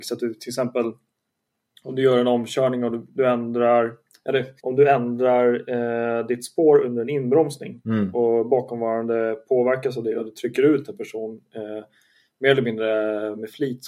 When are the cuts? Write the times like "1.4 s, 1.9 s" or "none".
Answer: 4.6 s